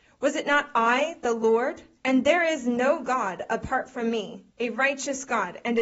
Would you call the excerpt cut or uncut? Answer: cut